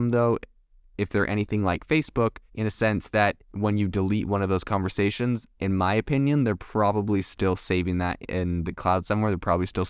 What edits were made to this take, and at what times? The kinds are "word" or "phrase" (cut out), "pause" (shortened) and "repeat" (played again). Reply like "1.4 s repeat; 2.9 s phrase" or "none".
2.5 s pause; 3.4 s pause; 5.5 s pause